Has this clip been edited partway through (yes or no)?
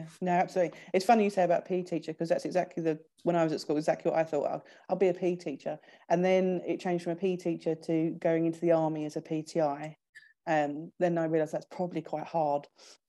no